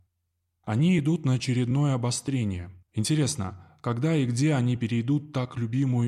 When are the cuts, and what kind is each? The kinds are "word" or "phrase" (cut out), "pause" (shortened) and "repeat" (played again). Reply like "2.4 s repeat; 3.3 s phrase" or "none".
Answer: 2.8 s pause